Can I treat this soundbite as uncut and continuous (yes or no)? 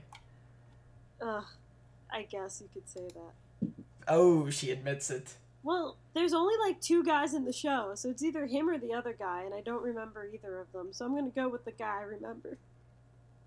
yes